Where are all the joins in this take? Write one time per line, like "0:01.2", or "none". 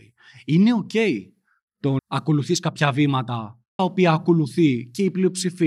0:02.0
0:03.8